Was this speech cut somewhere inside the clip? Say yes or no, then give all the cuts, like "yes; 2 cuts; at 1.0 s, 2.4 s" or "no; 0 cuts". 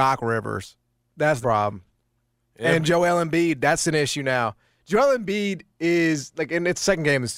yes; 1 cut; at 1.4 s